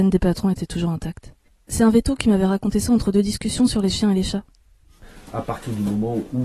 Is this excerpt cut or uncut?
cut